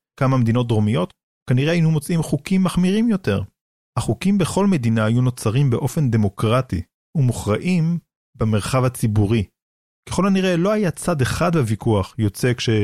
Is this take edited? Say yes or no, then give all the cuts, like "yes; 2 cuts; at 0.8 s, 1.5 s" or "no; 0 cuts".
no; 0 cuts